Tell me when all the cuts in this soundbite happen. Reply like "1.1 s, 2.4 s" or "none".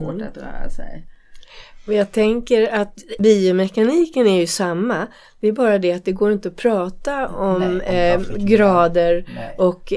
none